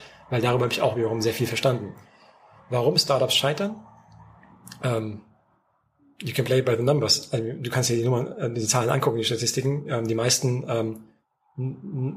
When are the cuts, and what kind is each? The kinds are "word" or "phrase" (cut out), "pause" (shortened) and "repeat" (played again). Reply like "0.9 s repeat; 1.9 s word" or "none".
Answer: none